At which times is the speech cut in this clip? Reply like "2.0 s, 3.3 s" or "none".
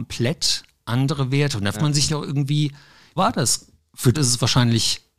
1.7 s, 2.1 s, 3.2 s, 4.1 s